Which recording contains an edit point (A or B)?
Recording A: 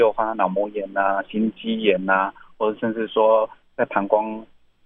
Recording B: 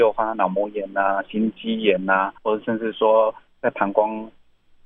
B